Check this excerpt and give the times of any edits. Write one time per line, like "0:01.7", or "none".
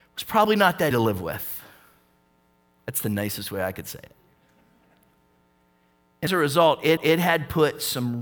0:00.9
0:06.3
0:07.0